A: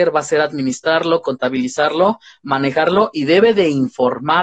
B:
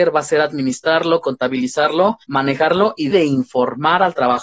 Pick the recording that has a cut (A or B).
B